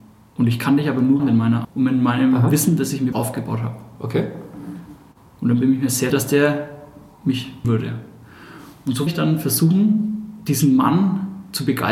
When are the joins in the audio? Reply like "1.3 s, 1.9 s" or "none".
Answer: 1.2 s, 1.6 s, 3.1 s, 6.1 s, 7.6 s, 9.1 s